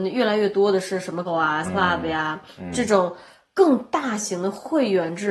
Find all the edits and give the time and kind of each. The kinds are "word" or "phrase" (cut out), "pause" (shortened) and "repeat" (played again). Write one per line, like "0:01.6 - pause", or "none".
0:01.3 - word
0:01.6 - word